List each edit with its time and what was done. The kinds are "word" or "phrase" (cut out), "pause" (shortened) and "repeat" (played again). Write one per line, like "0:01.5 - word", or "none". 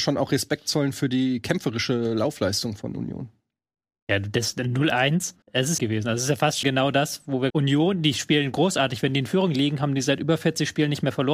0:05.4 - pause
0:05.8 - phrase
0:06.6 - word
0:07.5 - phrase